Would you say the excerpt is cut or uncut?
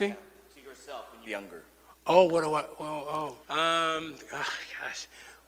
cut